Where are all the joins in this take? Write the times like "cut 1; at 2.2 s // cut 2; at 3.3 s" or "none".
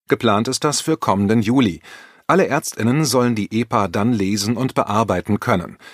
none